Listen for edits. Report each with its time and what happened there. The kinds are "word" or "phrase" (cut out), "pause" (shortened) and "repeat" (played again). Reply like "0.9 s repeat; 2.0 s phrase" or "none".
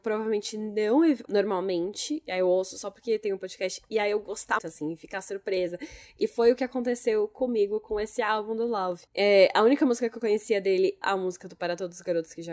1.3 s word; 4.6 s word; 9.1 s pause; 11.0 s word